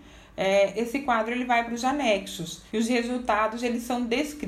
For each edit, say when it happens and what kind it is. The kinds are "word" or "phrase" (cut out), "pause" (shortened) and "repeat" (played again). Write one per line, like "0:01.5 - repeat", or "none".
0:02.7 - pause